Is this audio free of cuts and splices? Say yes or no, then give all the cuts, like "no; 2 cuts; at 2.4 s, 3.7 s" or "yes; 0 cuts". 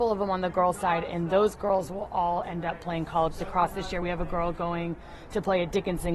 yes; 0 cuts